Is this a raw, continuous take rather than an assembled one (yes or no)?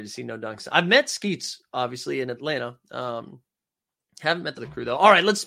no